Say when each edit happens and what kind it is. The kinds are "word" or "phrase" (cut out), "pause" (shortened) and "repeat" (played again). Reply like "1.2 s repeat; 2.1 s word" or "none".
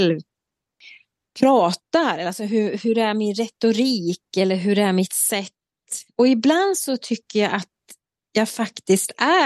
none